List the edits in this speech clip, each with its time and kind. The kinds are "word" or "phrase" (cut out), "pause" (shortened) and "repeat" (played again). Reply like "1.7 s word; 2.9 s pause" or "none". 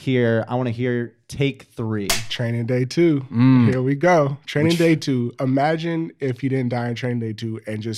none